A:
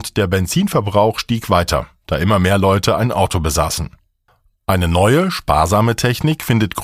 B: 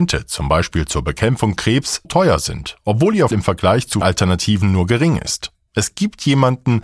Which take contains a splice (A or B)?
B